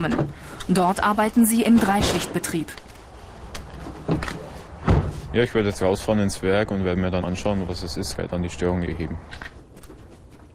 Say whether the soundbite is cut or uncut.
cut